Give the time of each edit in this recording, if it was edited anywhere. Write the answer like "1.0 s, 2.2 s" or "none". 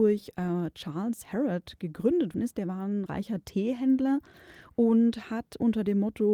1.2 s, 2.3 s, 3.1 s